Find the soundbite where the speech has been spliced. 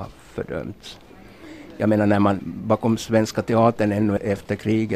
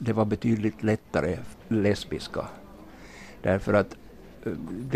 second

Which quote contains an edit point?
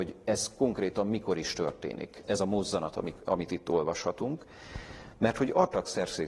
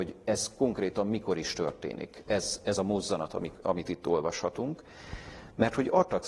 first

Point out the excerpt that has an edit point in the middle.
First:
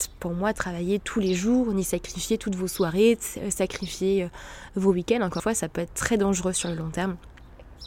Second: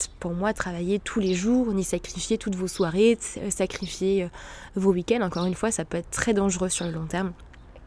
first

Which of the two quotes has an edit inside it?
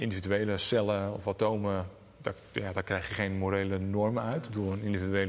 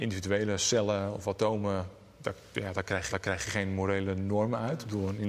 second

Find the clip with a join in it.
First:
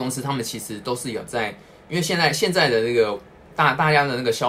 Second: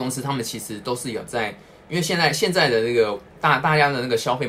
second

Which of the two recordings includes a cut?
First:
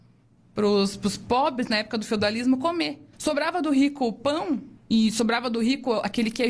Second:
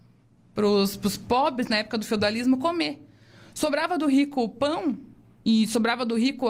first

